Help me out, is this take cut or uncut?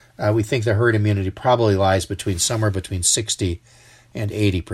uncut